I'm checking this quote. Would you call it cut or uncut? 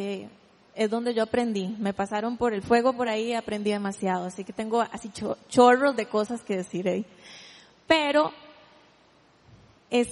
uncut